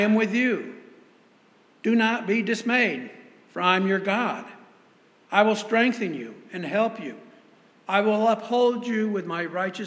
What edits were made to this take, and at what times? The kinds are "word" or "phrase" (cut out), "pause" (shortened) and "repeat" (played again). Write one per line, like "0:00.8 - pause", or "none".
none